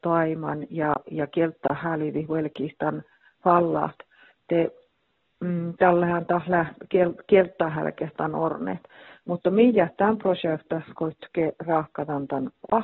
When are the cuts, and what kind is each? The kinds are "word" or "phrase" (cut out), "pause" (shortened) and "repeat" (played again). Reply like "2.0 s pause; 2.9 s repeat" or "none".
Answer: none